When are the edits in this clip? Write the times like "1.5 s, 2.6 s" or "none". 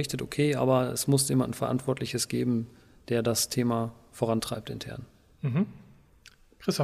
none